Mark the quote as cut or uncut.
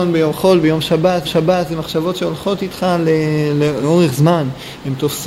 cut